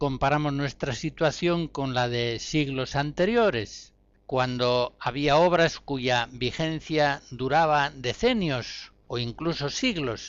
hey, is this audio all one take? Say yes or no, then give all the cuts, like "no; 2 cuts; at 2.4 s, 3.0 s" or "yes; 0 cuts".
yes; 0 cuts